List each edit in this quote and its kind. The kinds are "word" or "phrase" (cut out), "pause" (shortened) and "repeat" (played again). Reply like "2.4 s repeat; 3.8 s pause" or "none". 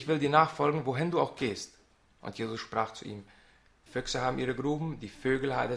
3.9 s word